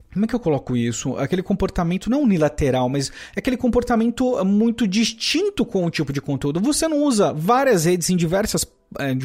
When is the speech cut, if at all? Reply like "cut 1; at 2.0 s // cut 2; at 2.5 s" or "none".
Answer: none

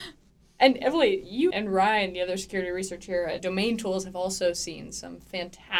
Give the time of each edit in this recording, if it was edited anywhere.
cut 1; at 1.5 s // cut 2; at 3.4 s

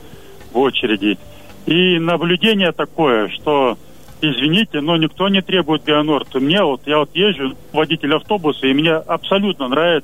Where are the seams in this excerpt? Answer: cut 1; at 7.7 s

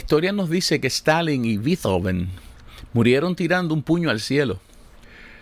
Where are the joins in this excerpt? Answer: none

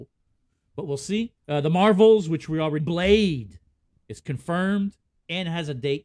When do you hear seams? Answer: cut 1; at 1.4 s // cut 2; at 2.8 s

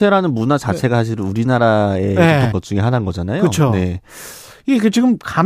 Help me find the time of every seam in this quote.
cut 1; at 2.5 s

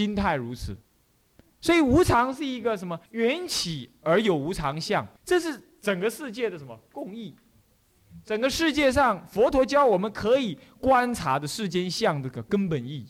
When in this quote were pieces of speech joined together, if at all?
cut 1; at 3.1 s // cut 2; at 5.2 s

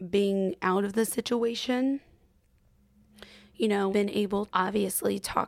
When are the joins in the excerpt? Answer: cut 1; at 3.9 s // cut 2; at 4.5 s

